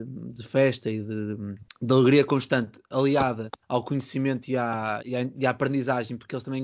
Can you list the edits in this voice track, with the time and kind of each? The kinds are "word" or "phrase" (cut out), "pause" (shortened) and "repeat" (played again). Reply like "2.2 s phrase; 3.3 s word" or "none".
1.7 s pause; 3.6 s pause